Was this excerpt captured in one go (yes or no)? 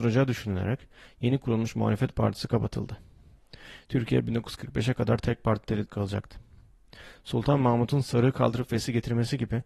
no